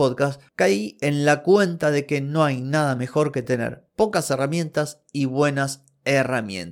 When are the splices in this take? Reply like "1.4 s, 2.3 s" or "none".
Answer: none